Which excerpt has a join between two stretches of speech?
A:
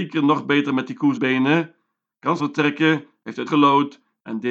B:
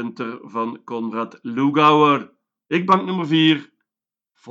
A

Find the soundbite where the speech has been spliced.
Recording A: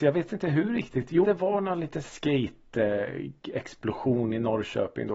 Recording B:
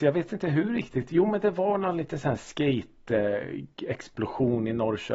A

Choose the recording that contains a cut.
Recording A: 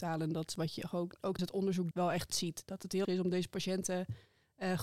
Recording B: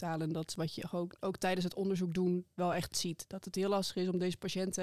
A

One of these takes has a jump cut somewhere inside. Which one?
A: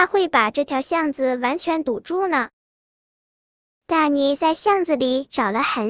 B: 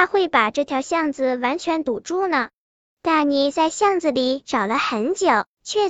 B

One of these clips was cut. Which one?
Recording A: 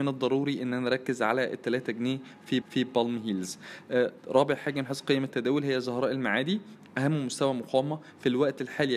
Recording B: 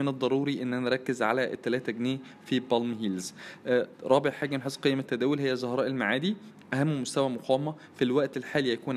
A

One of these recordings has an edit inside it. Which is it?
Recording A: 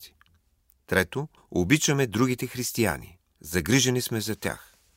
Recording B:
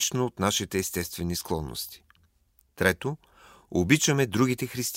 A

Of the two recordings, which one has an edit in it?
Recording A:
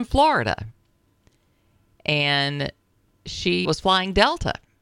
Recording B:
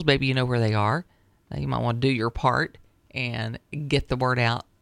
A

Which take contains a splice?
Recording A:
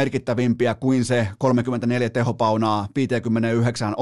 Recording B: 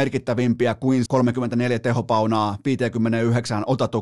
B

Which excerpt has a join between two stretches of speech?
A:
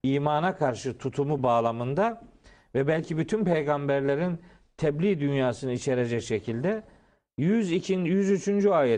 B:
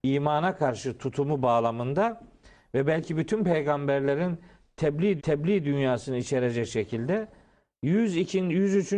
B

